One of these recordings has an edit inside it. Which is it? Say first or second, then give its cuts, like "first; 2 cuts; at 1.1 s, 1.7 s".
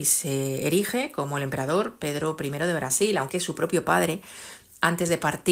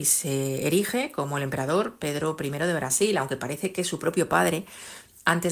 first; 1 cut; at 3.3 s